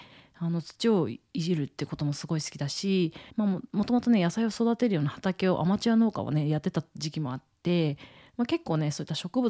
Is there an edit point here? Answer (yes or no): yes